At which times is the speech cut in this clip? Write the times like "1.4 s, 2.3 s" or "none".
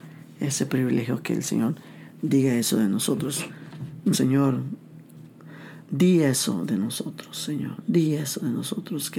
4.1 s

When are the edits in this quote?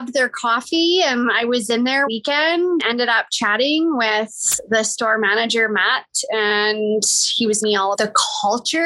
2.1 s, 2.8 s, 7.6 s, 7.9 s

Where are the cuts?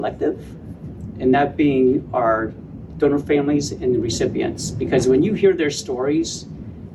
none

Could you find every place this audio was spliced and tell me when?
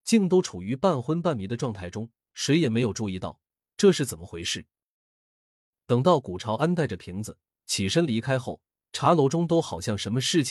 none

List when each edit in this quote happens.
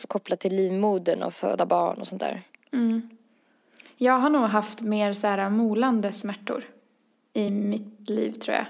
none

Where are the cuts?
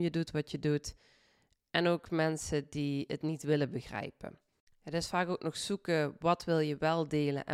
none

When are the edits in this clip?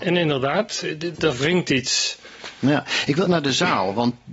1.1 s, 3.3 s

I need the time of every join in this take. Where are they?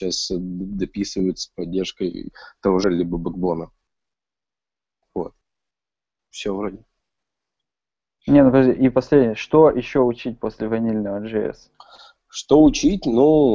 2.8 s

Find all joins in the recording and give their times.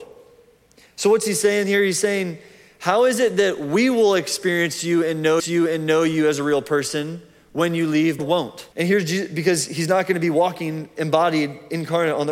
5.4 s, 8.2 s, 8.7 s

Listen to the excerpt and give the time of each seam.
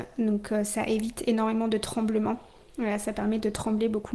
none

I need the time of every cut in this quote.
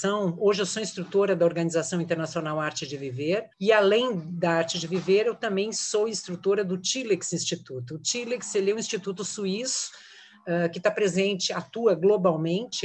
none

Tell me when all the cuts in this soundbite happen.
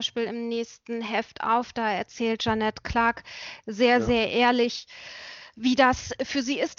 none

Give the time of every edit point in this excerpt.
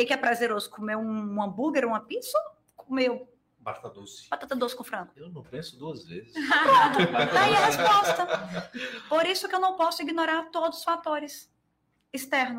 none

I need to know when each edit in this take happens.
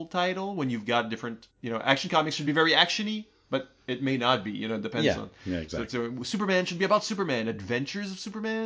none

